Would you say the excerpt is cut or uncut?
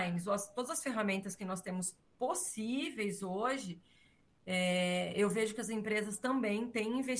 uncut